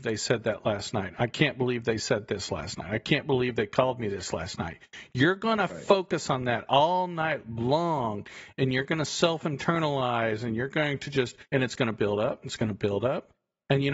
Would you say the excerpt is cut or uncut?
cut